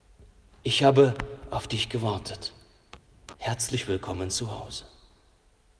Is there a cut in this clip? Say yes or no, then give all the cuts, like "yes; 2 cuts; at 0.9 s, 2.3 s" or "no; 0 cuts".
yes; 1 cut; at 3.4 s